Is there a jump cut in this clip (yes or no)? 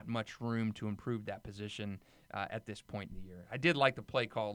no